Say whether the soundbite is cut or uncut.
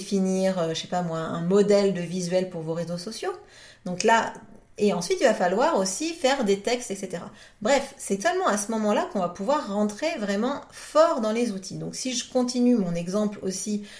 uncut